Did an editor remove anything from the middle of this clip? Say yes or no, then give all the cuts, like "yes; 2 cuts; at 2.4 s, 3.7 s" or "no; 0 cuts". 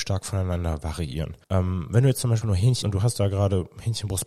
yes; 3 cuts; at 1.4 s, 2.4 s, 2.8 s